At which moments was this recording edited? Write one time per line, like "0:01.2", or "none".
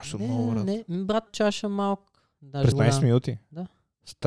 0:01.3
0:02.7